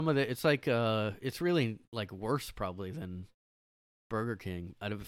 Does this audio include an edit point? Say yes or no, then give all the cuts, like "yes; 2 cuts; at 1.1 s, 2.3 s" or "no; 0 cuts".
no; 0 cuts